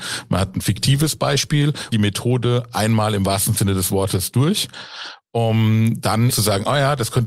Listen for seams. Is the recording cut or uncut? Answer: cut